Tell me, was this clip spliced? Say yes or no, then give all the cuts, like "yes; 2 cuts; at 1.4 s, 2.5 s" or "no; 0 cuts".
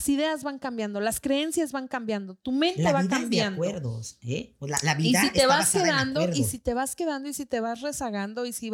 no; 0 cuts